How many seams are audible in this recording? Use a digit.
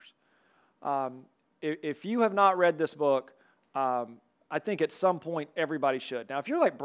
0